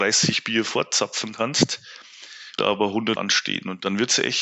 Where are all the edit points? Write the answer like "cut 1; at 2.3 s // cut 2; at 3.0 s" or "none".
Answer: cut 1; at 2.6 s // cut 2; at 3.2 s